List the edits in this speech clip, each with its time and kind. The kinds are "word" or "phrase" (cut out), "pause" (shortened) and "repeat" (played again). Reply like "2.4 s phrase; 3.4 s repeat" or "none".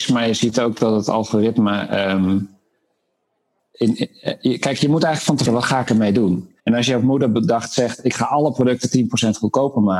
3.6 s word; 5.5 s phrase; 6.6 s pause